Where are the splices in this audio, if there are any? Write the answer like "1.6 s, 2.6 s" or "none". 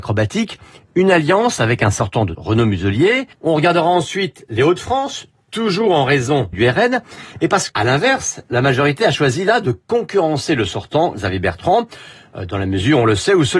2.3 s, 3.3 s, 6.5 s, 7.7 s